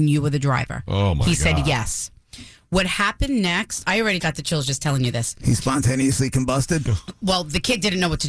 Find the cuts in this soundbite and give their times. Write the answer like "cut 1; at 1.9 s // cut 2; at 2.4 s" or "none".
cut 1; at 4.2 s